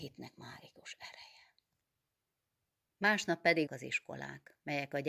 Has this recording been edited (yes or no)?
yes